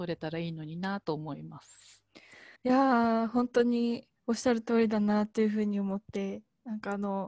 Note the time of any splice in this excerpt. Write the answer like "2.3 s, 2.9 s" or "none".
2.6 s, 4.2 s